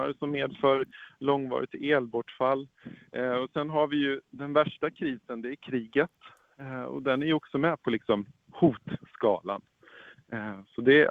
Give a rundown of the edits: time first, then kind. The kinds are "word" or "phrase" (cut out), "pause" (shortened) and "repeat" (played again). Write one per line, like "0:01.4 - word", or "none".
none